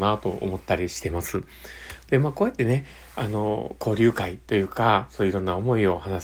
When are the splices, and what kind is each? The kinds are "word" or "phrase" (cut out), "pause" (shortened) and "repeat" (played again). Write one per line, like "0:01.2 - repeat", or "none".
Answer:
none